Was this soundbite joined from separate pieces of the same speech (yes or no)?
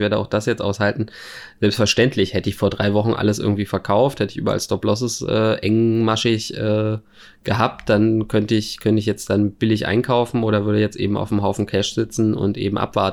no